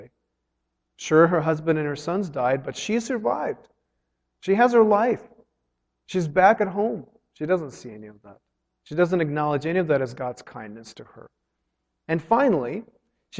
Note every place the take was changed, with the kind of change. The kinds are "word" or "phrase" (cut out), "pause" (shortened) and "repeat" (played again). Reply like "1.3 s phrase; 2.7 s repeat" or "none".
none